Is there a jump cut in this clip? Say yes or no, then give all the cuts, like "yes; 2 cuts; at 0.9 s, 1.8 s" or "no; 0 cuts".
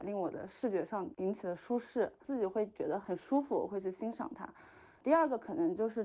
no; 0 cuts